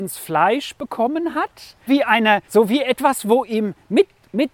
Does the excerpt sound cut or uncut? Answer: cut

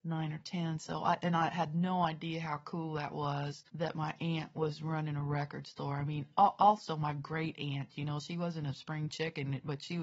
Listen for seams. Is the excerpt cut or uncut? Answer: cut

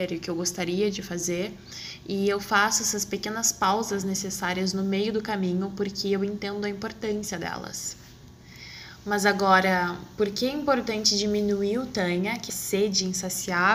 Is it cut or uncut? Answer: cut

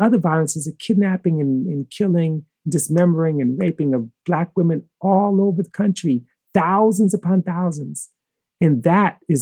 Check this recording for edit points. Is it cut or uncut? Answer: uncut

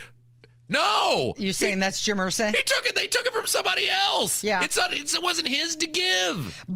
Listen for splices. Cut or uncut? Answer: uncut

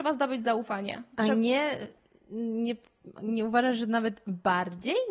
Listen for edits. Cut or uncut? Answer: uncut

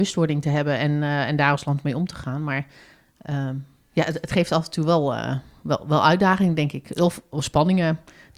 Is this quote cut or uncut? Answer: uncut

